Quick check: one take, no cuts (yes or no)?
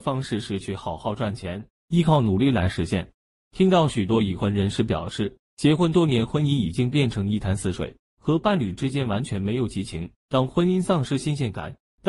no